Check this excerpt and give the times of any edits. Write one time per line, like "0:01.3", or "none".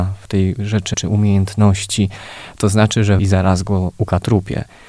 0:00.9
0:03.2

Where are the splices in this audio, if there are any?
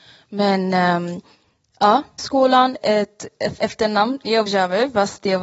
0:02.2
0:02.8
0:03.6
0:04.5

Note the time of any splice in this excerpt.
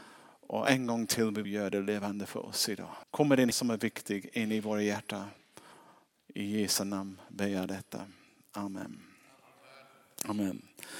0:01.4
0:03.0
0:03.5

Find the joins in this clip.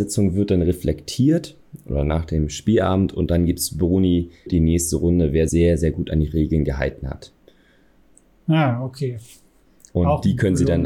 0:04.5
0:05.5

